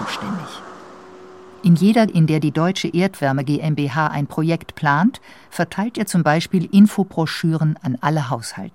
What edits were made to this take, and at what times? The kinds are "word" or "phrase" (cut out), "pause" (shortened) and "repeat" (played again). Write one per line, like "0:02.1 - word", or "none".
0:02.1 - word